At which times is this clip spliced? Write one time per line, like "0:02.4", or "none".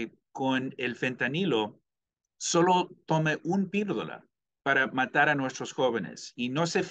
none